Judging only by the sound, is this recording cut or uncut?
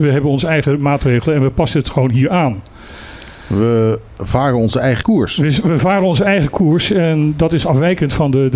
cut